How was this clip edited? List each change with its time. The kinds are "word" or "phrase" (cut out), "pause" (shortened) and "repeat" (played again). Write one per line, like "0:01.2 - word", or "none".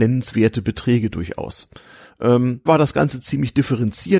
0:02.7 - word